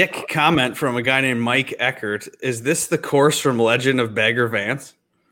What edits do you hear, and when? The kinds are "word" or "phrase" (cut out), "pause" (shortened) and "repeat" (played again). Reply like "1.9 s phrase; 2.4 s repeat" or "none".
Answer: none